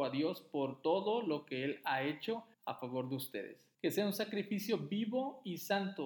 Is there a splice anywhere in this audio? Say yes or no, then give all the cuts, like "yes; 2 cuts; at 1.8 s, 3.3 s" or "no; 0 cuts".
yes; 2 cuts; at 2.5 s, 3.7 s